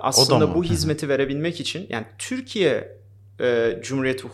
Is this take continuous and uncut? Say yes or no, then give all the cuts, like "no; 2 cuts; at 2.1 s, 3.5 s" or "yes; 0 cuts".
yes; 0 cuts